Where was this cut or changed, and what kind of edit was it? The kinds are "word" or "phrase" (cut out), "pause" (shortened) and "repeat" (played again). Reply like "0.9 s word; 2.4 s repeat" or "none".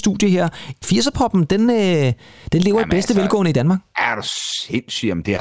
none